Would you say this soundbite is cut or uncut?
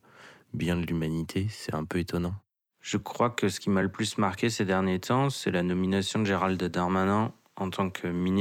uncut